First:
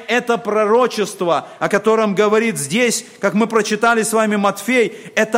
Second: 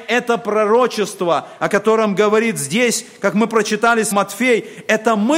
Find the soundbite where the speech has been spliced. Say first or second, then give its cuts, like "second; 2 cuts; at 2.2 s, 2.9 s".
second; 1 cut; at 4.1 s